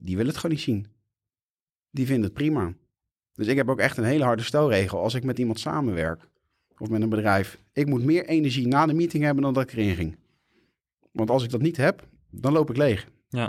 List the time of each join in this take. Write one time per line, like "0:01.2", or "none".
none